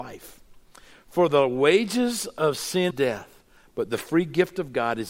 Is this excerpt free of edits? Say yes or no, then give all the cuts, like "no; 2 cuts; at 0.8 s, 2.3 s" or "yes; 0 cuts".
no; 1 cut; at 2.9 s